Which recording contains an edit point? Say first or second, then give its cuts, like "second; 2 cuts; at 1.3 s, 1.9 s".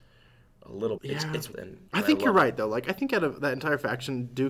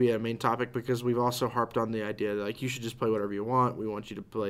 first; 3 cuts; at 1.0 s, 1.5 s, 1.9 s